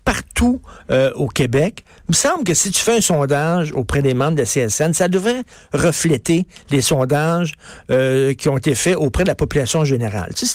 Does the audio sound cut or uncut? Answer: uncut